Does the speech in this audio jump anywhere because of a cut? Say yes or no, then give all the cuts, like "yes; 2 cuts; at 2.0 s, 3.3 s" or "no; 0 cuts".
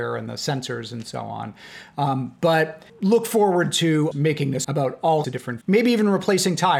yes; 5 cuts; at 2.9 s, 4.1 s, 4.6 s, 5.2 s, 5.6 s